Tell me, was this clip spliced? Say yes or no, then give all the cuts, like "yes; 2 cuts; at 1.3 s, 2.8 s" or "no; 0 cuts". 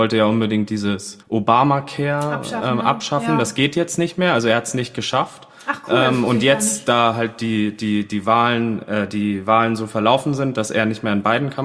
yes; 1 cut; at 1.2 s